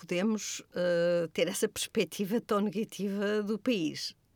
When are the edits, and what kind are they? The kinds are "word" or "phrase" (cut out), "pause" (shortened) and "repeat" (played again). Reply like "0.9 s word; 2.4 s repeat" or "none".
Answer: none